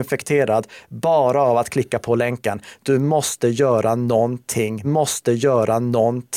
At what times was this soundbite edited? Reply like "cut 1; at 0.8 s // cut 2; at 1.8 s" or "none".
cut 1; at 4.8 s